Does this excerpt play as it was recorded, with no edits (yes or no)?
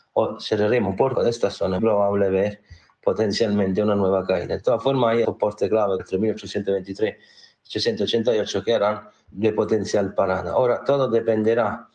no